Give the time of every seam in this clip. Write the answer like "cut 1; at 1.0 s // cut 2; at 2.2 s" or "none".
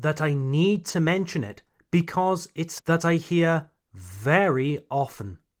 cut 1; at 2.8 s